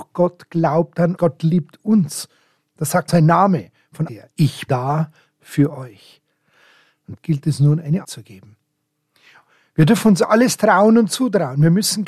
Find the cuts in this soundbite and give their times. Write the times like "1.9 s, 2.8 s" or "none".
1.2 s, 3.1 s, 4.1 s, 4.7 s, 7.2 s, 8.0 s